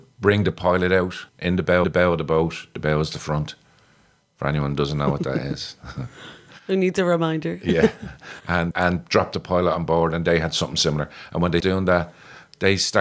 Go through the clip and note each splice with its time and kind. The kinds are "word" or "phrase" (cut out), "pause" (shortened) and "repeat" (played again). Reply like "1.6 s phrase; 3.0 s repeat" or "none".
1.3 s pause; 1.8 s repeat; 8.7 s word; 11.6 s word

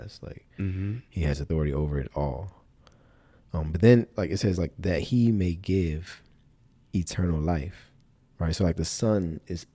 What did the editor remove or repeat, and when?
none

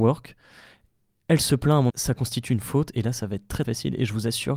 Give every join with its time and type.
1.9 s word; 3.6 s word

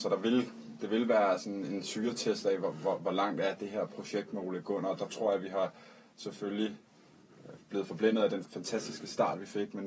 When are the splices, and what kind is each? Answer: 8.4 s word

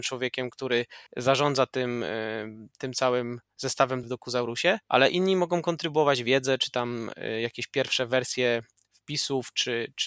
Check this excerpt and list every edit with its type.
1.1 s pause; 4.0 s phrase; 4.8 s pause

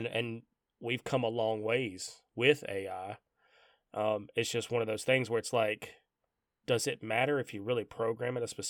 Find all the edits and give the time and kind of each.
none

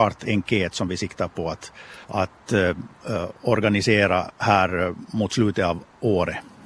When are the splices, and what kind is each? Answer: 2.0 s pause; 3.4 s pause

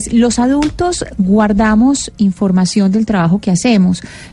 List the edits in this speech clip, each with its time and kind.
none

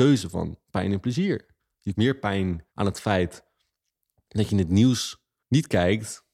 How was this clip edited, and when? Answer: 1.9 s word; 2.7 s pause

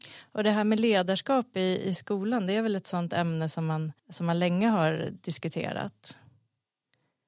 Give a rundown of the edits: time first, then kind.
4.0 s pause

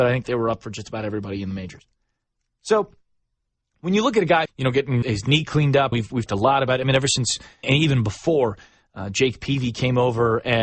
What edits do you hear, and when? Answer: 4.5 s word; 5.0 s word; 5.9 s word; 6.3 s word; 7.6 s word

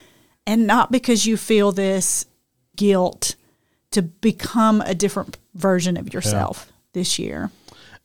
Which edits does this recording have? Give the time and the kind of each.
2.7 s word

